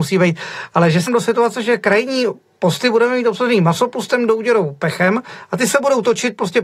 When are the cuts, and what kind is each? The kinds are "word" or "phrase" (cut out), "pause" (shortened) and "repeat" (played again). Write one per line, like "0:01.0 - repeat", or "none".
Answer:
0:01.1 - word

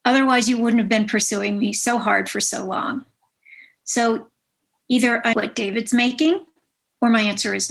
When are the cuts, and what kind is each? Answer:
0:05.3 - word

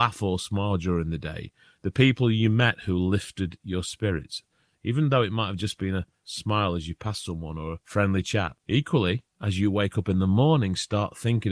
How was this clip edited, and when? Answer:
none

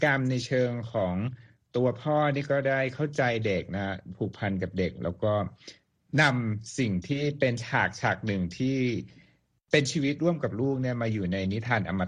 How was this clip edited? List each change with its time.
none

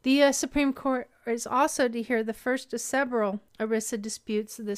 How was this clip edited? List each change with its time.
0:03.5 - pause

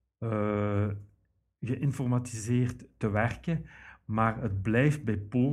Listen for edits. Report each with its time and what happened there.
none

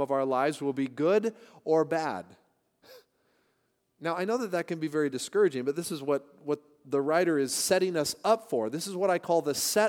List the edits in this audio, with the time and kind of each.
none

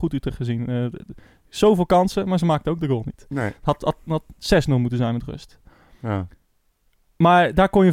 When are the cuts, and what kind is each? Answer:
none

